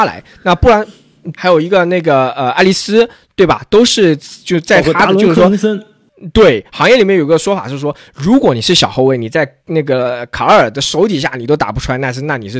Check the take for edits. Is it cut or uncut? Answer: cut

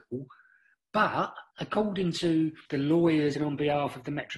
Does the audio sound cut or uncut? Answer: cut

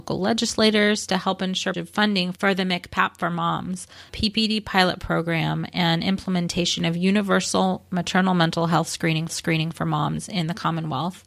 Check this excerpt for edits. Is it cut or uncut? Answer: cut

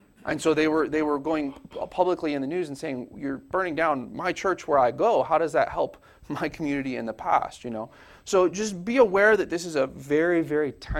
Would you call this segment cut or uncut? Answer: uncut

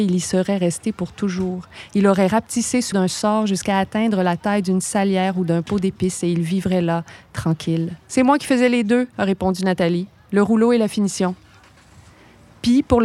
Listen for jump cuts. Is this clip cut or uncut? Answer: cut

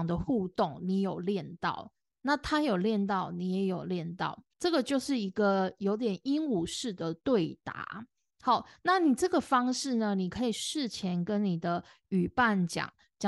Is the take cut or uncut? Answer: cut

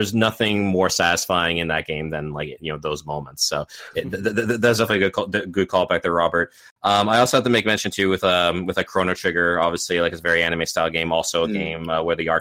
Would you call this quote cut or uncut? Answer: uncut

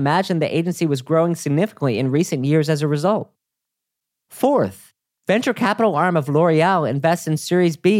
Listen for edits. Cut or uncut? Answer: uncut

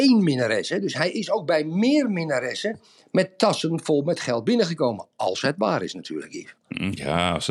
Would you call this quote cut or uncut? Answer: uncut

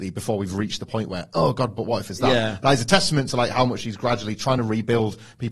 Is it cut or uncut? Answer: uncut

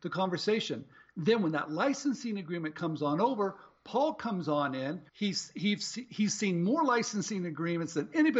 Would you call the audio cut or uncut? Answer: cut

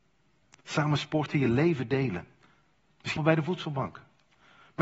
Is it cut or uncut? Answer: cut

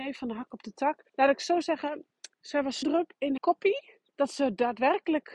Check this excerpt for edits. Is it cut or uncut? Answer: cut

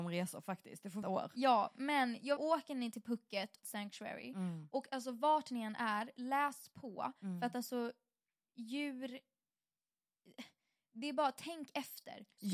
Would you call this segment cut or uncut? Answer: cut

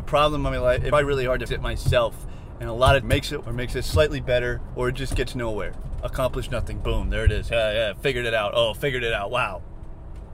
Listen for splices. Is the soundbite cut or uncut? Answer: cut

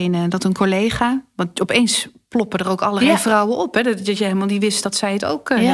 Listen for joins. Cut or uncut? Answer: uncut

